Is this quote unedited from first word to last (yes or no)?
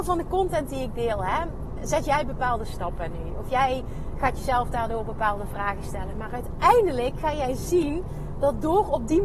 yes